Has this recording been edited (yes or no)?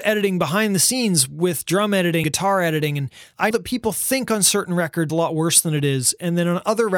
yes